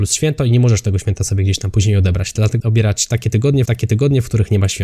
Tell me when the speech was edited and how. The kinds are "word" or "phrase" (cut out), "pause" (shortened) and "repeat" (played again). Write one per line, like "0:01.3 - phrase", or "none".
0:02.6 - word
0:03.7 - repeat